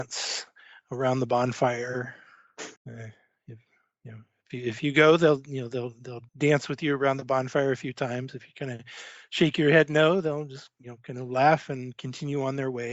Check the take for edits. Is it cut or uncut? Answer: cut